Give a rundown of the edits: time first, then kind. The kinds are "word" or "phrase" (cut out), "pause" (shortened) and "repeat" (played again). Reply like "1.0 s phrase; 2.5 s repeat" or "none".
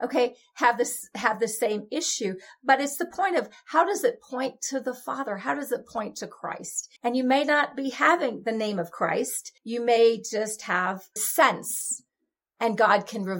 7.0 s pause; 9.6 s pause; 11.2 s phrase